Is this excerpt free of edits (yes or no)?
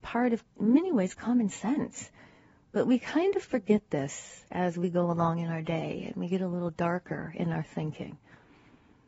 yes